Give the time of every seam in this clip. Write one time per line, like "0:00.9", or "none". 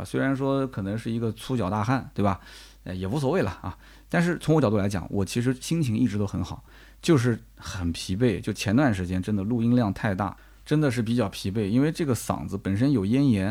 none